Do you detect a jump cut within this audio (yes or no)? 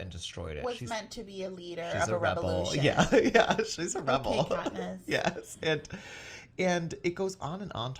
no